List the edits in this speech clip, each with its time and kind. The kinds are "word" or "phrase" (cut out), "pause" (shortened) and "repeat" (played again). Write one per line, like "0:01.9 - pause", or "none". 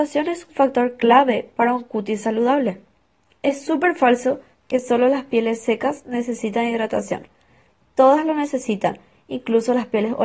none